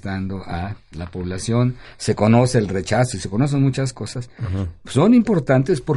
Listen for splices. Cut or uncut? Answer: uncut